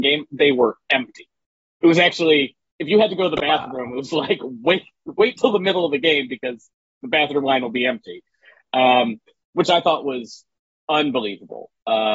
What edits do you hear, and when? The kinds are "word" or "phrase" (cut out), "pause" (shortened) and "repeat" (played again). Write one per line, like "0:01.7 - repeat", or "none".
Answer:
none

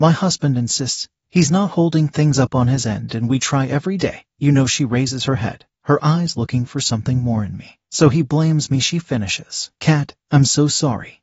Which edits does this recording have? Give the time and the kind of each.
0:04.3 - pause

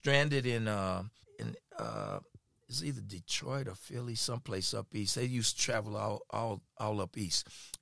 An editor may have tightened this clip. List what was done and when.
0:01.2 - pause

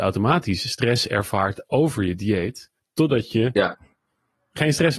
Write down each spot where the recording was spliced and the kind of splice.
0:02.8 - pause

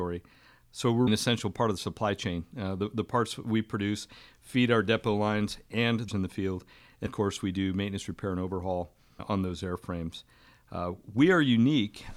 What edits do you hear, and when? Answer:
0:01.1 - word
0:06.1 - word
0:07.1 - word
0:09.2 - word

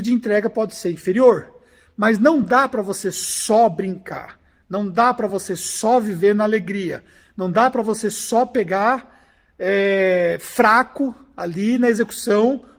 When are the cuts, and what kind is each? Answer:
none

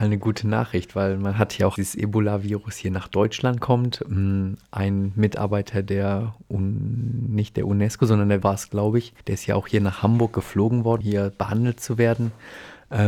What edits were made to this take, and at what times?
0:01.8 - phrase
0:08.4 - word
0:09.2 - pause
0:11.0 - word

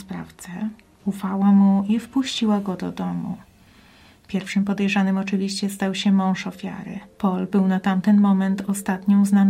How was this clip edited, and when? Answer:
0:07.1 - pause

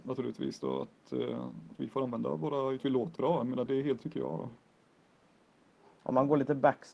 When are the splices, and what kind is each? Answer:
0:01.7 - word
0:02.8 - phrase
0:03.2 - word
0:03.7 - word
0:04.0 - word

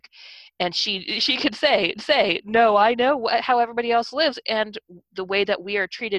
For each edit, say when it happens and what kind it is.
0:02.0 - repeat

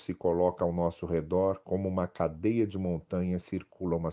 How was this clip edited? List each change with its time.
none

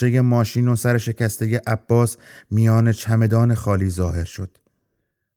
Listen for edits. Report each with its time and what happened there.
none

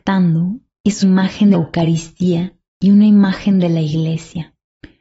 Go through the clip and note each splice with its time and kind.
0:01.0 - word
0:01.5 - word

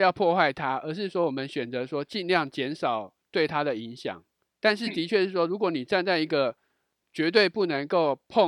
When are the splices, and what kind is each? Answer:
0:04.5 - pause

